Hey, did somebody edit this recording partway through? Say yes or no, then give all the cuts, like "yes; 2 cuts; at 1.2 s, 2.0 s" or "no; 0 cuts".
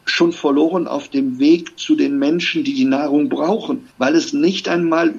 yes; 1 cut; at 3.9 s